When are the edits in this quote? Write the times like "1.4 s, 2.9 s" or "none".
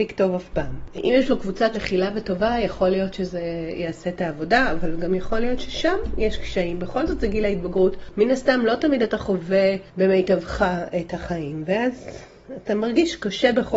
1.7 s